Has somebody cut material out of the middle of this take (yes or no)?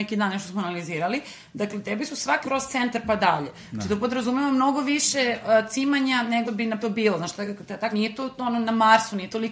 yes